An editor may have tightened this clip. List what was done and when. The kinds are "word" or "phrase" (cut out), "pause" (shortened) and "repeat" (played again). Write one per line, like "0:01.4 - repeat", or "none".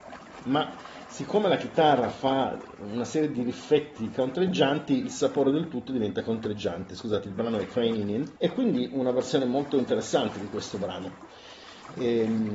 0:08.4 - pause